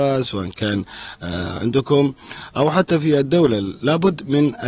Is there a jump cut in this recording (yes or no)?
no